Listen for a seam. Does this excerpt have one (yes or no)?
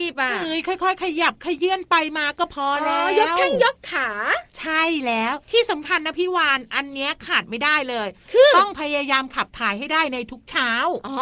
yes